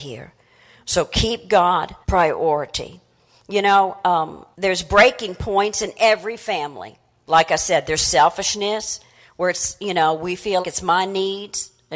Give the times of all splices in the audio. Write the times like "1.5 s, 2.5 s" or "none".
2.0 s, 4.5 s, 10.6 s